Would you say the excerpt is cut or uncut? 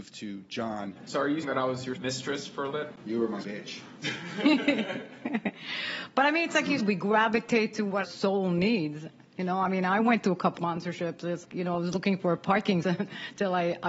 cut